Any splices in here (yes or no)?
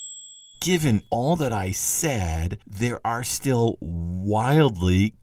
yes